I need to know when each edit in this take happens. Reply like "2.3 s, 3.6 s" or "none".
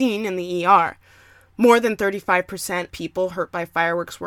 2.9 s